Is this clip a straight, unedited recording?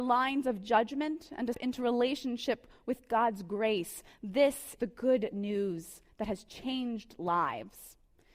no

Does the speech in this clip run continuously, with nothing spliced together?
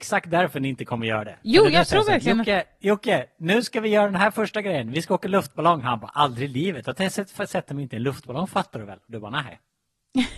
yes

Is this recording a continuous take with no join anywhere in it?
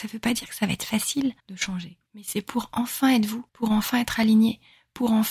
no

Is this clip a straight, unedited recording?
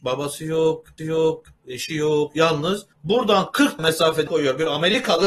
no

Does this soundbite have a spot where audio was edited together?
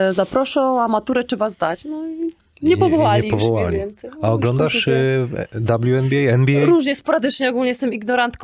no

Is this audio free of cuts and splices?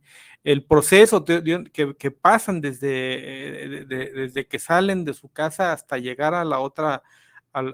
yes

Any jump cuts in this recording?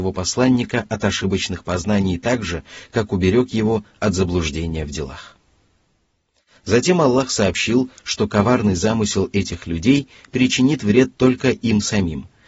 no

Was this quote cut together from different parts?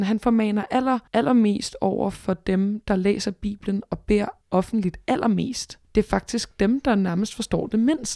yes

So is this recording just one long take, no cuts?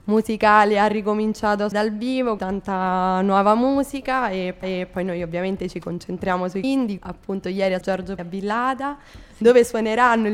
no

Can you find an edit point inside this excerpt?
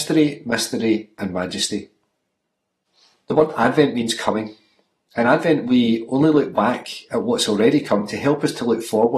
no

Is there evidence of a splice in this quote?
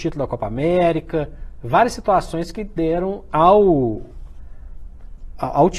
no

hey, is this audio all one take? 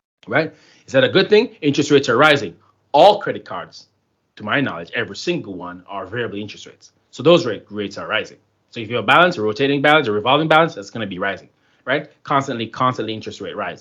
yes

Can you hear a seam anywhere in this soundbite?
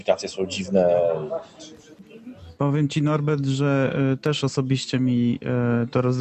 no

